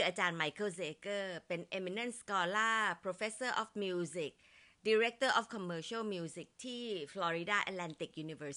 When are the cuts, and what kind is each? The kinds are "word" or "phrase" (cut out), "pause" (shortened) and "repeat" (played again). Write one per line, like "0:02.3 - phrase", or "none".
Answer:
none